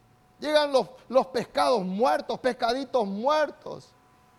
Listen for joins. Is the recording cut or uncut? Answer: uncut